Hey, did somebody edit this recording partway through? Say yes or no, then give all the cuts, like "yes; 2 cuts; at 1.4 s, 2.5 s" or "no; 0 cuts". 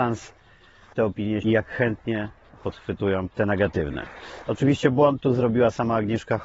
yes; 4 cuts; at 0.9 s, 1.4 s, 2.6 s, 3.3 s